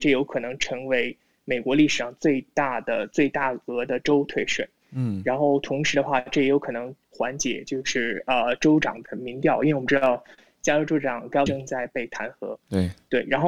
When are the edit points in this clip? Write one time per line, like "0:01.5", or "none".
0:07.0
0:11.5